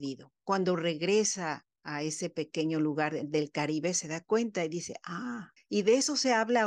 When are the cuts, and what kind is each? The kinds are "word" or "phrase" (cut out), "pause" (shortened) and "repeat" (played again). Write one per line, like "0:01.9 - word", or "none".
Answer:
0:05.6 - pause